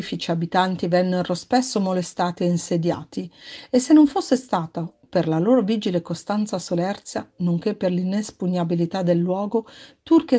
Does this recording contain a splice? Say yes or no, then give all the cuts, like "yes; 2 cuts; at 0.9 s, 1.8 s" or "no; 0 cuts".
no; 0 cuts